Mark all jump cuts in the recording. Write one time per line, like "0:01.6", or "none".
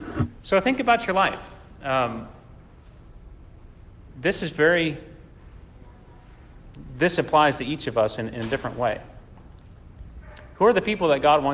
none